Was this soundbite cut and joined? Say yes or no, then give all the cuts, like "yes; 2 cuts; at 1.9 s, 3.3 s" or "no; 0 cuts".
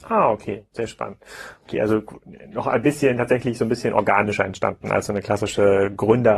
no; 0 cuts